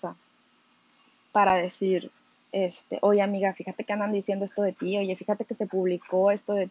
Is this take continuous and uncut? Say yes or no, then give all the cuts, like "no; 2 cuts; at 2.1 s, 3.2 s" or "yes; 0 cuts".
no; 1 cut; at 2.3 s